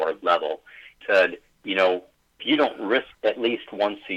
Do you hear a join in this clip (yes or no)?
yes